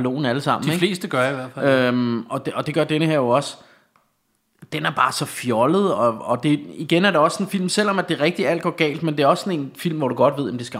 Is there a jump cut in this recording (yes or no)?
no